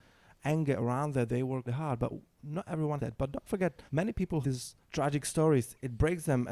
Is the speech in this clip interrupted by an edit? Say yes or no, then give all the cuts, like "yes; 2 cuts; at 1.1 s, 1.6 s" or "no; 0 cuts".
yes; 6 cuts; at 1.3 s, 1.7 s, 3.0 s, 3.9 s, 4.4 s, 4.8 s